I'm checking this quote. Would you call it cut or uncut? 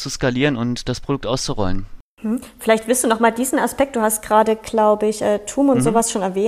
uncut